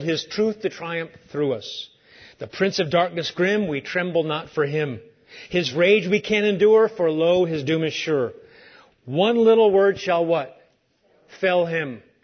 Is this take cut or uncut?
uncut